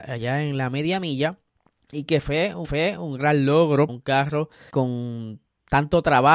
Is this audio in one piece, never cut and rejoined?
no; 4 cuts; at 1.5 s, 2.6 s, 3.9 s, 4.7 s

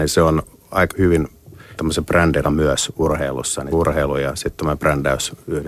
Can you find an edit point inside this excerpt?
yes; 4 cuts; at 0.9 s, 1.8 s, 2.4 s, 3.7 s

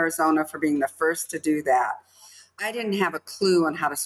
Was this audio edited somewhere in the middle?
no; 0 cuts

